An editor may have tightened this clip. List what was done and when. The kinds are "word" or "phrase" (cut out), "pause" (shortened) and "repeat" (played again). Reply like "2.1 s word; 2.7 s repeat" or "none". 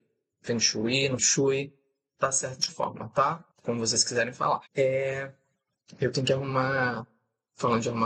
1.2 s word; 2.7 s word; 3.5 s pause; 4.7 s pause